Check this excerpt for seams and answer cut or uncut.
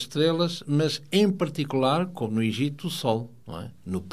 uncut